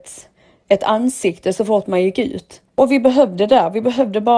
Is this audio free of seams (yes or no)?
no